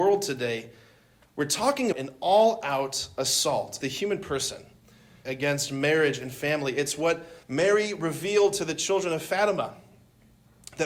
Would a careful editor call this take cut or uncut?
cut